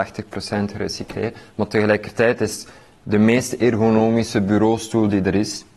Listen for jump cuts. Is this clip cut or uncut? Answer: uncut